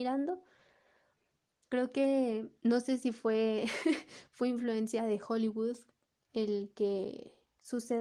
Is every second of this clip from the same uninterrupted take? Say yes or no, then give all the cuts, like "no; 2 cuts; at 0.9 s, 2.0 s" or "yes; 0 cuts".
yes; 0 cuts